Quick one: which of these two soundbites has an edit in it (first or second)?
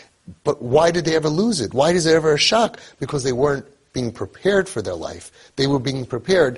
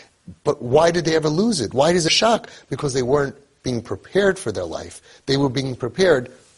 second